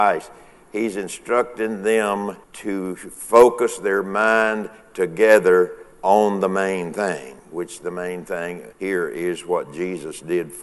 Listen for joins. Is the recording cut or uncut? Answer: cut